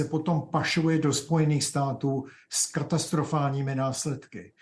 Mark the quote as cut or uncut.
uncut